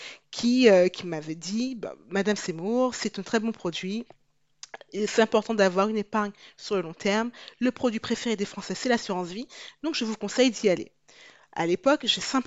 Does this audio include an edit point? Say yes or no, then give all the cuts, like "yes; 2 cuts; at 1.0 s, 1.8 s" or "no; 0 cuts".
no; 0 cuts